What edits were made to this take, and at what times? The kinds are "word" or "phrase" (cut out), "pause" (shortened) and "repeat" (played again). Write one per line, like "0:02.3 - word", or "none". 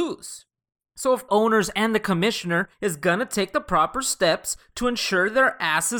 0:01.3 - phrase
0:02.7 - pause